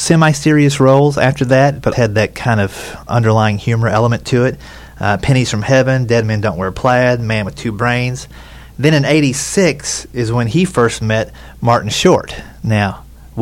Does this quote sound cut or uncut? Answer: cut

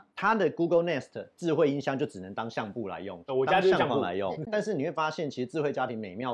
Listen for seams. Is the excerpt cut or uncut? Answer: uncut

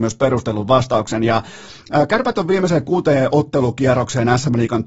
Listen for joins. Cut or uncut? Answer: uncut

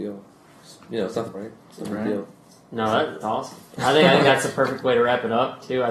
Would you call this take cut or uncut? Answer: cut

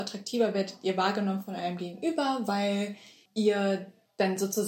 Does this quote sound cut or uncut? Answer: uncut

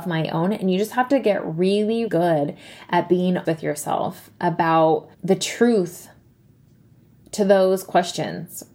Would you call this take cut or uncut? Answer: cut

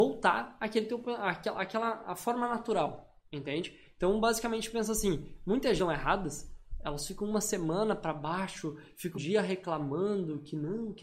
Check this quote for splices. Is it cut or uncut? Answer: cut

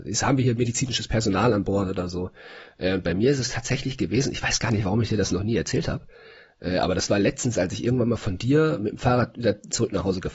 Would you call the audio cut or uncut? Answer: uncut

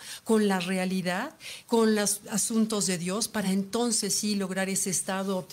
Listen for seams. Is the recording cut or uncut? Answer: uncut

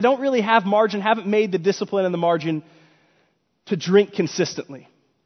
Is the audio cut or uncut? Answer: uncut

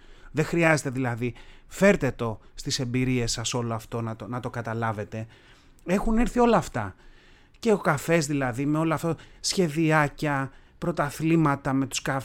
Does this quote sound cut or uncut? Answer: uncut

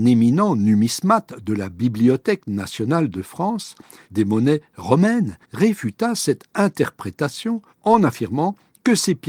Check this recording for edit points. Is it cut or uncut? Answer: cut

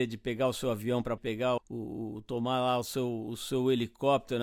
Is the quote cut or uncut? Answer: cut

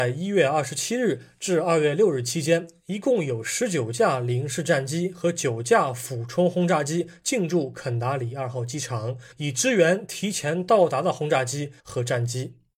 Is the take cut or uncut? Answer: cut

